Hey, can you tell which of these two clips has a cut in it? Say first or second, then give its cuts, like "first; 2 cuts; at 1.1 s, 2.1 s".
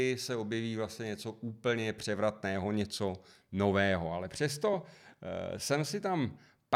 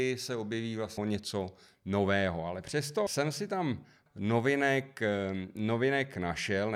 second; 3 cuts; at 1.0 s, 3.1 s, 4.1 s